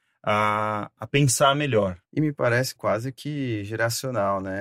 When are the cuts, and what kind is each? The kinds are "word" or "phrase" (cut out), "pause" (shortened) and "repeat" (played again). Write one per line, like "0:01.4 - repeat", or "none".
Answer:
0:02.0 - pause
0:02.8 - phrase